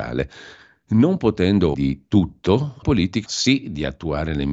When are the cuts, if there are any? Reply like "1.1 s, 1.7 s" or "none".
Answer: 1.7 s, 2.8 s, 3.3 s